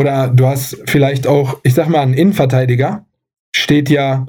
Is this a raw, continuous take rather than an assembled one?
yes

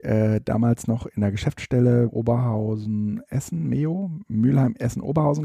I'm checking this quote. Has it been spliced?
yes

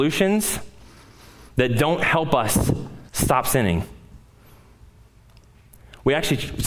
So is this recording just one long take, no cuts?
no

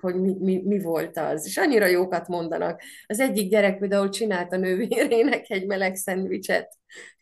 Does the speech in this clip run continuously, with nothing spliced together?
yes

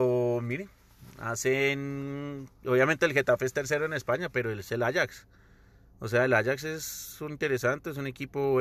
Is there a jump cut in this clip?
yes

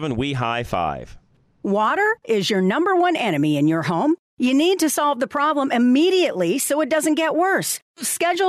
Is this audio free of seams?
no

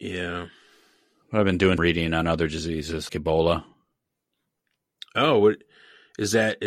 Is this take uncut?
no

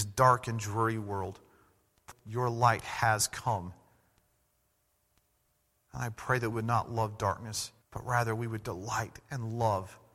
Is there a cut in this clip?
yes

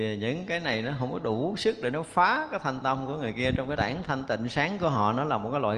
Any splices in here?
yes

